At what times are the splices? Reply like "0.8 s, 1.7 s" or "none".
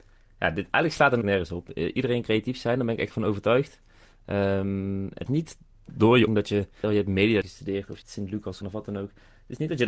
1.2 s, 2.2 s, 3.1 s, 5.3 s, 6.3 s, 6.8 s, 7.4 s, 8.0 s, 8.6 s

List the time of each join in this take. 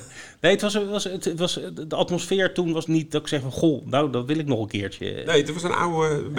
2.9 s

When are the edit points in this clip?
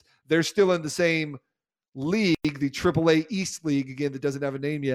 none

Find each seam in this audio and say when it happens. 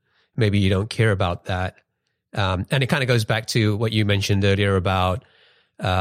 none

